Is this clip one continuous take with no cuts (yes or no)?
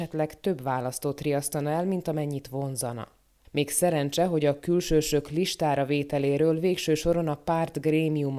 yes